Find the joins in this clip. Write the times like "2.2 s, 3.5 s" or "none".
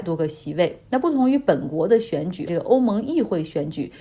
2.5 s